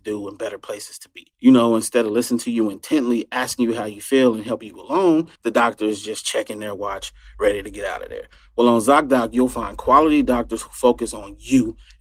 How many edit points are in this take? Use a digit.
2